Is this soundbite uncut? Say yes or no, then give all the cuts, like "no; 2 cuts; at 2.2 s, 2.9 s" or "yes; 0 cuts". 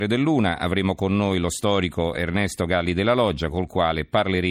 yes; 0 cuts